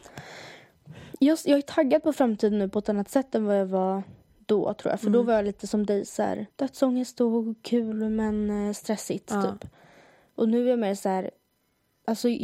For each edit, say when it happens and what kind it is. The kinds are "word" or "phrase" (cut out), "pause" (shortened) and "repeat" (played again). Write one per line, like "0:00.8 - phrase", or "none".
0:04.2 - pause
0:06.5 - pause